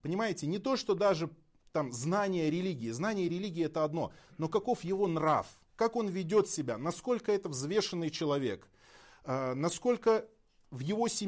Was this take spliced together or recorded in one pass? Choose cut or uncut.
uncut